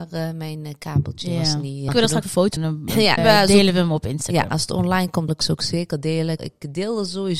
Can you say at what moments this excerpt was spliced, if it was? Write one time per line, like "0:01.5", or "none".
0:01.9
0:02.2
0:02.6
0:03.2
0:05.3
0:06.4